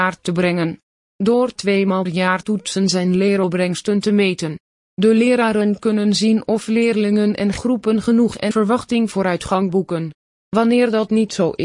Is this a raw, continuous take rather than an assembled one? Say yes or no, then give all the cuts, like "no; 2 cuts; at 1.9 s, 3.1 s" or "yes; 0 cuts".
no; 3 cuts; at 2.1 s, 2.4 s, 8.5 s